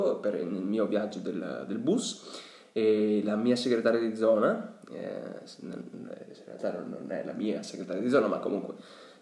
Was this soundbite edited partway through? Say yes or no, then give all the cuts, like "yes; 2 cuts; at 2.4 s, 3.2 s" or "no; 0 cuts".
no; 0 cuts